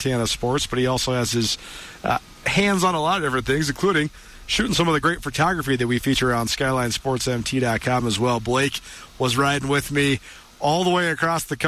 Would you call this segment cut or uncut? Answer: uncut